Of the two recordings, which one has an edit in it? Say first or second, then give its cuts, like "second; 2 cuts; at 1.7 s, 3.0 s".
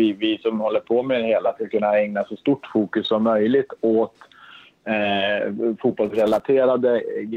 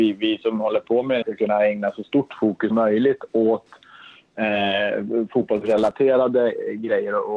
second; 2 cuts; at 1.2 s, 2.7 s